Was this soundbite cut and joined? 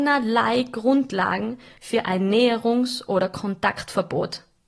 no; 0 cuts

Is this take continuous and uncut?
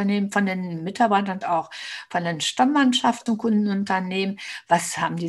no; 2 cuts; at 1.4 s, 3.3 s

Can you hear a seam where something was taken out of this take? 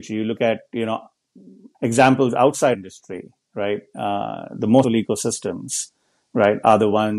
yes; 3 cuts; at 1.7 s, 2.7 s, 4.8 s

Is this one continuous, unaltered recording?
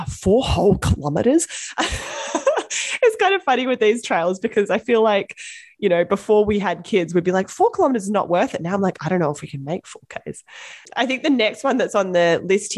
yes; 0 cuts

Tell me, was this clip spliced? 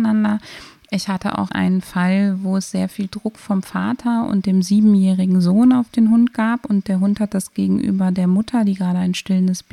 yes; 1 cut; at 1.5 s

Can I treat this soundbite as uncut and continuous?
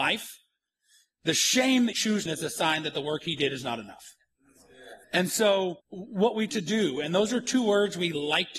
no; 5 cuts; at 1.9 s, 2.3 s, 5.0 s, 5.8 s, 6.5 s

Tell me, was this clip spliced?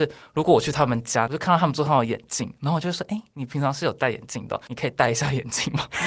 no; 0 cuts

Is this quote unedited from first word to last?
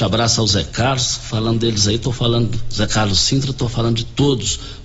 yes; 0 cuts

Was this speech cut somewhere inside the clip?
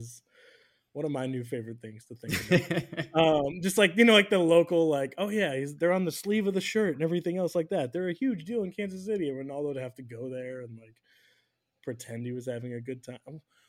no; 0 cuts

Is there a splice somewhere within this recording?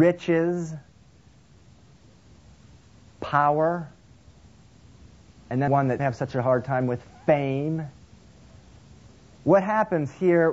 yes; 2 cuts; at 5.7 s, 6.0 s

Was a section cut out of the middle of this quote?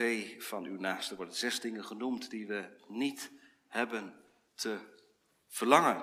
no; 0 cuts

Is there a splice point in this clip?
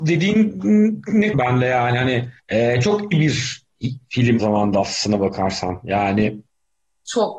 yes; 4 cuts; at 1.3 s, 2.4 s, 3.1 s, 4.4 s

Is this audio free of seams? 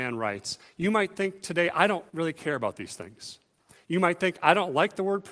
no; 2 cuts; at 2.1 s, 3.6 s

